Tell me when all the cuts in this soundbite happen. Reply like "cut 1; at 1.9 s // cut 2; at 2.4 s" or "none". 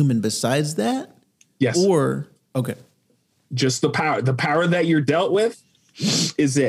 none

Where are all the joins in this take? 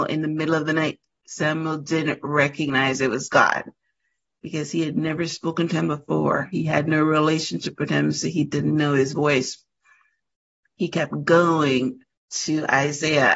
none

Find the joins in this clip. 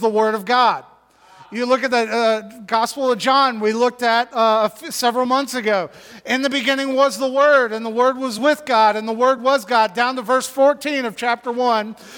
none

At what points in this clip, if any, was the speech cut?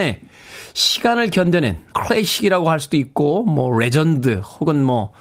cut 1; at 1.9 s

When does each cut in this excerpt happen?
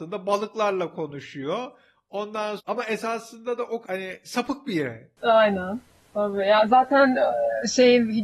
cut 1; at 2.6 s // cut 2; at 3.8 s

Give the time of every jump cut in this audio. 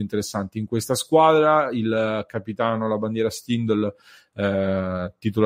none

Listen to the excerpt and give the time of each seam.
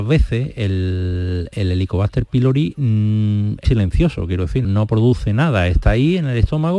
cut 1; at 3.6 s // cut 2; at 4.6 s

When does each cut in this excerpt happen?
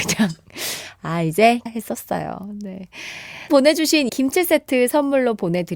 cut 1; at 1.7 s // cut 2; at 3.5 s // cut 3; at 4.1 s

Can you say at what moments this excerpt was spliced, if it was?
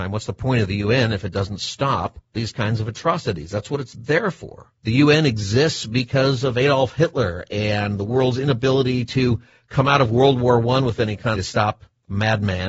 cut 1; at 2.2 s // cut 2; at 4.8 s // cut 3; at 11.4 s

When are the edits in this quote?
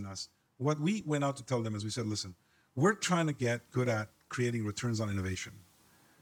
none

